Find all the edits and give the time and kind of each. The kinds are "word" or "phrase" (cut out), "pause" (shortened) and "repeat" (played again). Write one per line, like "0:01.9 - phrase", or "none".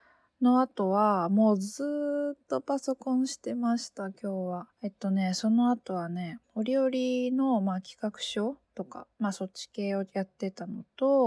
0:04.7 - pause
0:06.4 - pause
0:08.6 - pause
0:09.1 - pause